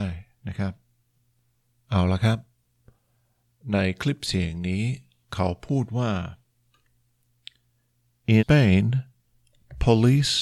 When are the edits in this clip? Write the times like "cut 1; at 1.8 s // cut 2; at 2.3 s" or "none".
cut 1; at 8.4 s